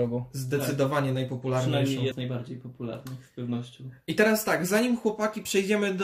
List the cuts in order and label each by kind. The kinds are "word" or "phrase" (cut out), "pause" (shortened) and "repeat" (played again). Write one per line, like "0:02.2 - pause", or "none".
0:02.1 - word